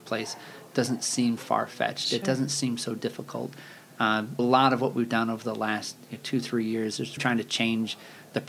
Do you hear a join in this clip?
yes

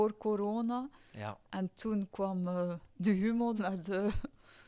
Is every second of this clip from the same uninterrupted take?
no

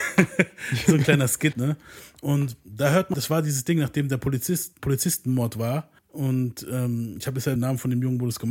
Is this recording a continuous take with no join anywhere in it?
no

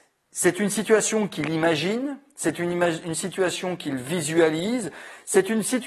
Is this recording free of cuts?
yes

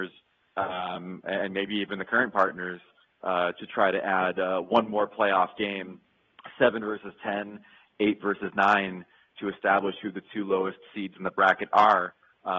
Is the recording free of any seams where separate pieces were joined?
yes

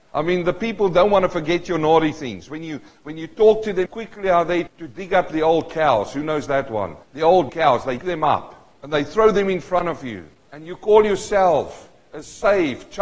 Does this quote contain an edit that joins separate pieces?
yes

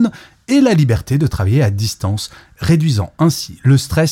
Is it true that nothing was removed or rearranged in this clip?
yes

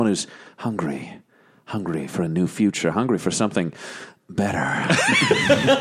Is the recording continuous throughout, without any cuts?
yes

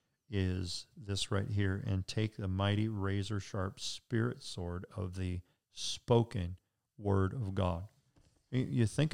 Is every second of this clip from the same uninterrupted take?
yes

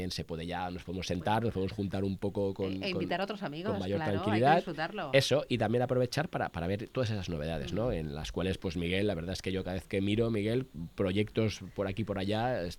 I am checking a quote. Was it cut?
no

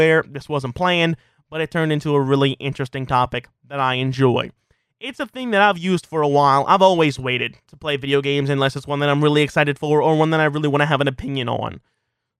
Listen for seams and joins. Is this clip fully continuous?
yes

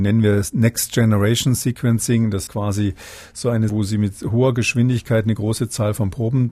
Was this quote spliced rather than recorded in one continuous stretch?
yes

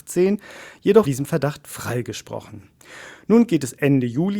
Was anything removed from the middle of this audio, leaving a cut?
yes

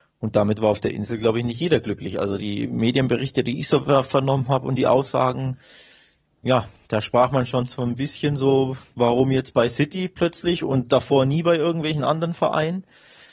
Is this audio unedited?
yes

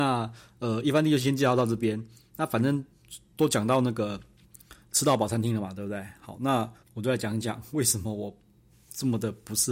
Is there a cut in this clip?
yes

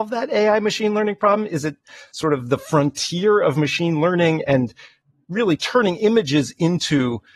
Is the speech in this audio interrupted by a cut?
no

